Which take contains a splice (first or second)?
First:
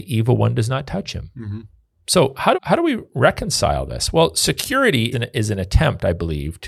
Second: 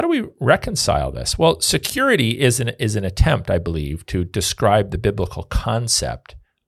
first